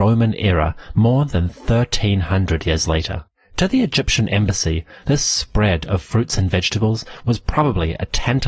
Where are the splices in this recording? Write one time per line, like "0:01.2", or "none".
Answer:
none